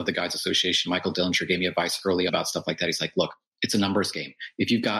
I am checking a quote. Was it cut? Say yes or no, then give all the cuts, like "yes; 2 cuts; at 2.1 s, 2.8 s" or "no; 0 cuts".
yes; 1 cut; at 2.3 s